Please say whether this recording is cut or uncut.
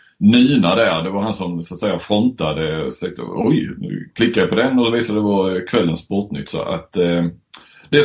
uncut